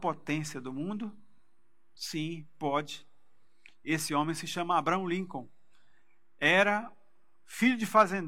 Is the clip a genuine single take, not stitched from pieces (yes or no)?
yes